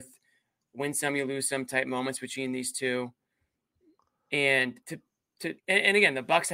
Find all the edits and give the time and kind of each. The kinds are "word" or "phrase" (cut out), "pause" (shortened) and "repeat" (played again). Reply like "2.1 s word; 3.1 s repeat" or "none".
4.8 s pause; 5.6 s pause